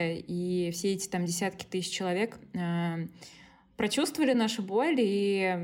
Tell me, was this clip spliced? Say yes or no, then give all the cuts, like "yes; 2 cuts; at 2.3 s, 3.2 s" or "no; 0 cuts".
no; 0 cuts